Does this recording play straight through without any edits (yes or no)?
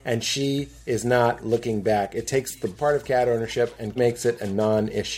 no